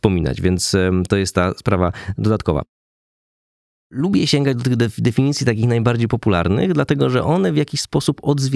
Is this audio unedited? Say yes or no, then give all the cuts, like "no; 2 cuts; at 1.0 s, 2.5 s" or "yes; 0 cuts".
yes; 0 cuts